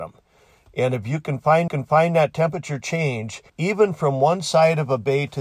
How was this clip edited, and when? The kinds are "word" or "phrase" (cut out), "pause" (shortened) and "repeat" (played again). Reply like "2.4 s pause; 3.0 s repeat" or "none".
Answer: 1.7 s repeat; 3.5 s pause